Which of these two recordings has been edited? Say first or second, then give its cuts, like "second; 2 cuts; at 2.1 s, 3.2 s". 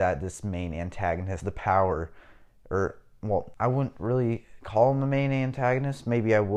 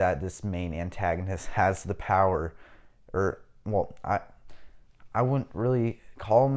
first; 2 cuts; at 1.4 s, 3.5 s